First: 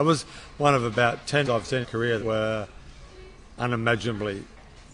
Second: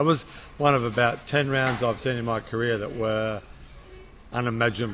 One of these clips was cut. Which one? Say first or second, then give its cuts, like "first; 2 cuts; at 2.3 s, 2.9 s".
first; 3 cuts; at 1.4 s, 1.8 s, 2.2 s